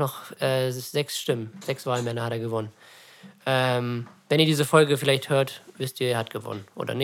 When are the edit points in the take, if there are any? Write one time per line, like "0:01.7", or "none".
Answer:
none